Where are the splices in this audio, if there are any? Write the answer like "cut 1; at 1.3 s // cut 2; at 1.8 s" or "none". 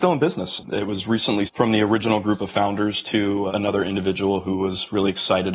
cut 1; at 1.4 s // cut 2; at 3.5 s